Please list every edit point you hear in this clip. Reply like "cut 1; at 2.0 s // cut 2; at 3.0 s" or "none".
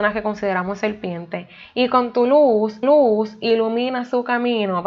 cut 1; at 2.8 s